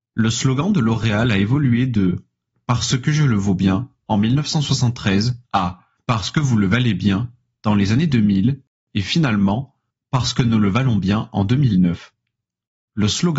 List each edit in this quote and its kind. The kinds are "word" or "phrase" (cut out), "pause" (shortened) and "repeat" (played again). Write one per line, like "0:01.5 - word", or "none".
0:05.4 - pause